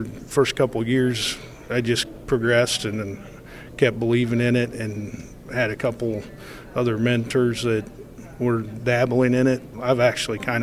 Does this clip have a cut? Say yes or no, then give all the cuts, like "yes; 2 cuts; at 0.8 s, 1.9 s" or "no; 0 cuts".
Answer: no; 0 cuts